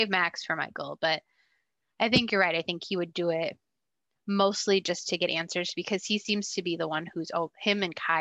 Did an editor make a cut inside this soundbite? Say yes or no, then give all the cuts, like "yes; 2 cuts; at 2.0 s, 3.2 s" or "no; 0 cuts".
no; 0 cuts